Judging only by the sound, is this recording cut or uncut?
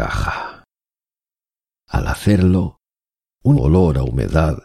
cut